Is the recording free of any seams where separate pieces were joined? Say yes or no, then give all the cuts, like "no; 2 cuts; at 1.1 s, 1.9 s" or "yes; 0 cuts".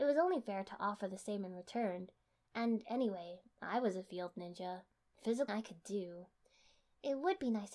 no; 1 cut; at 5.5 s